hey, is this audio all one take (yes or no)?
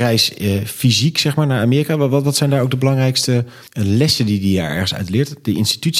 no